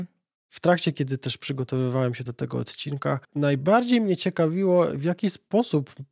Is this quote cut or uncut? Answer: cut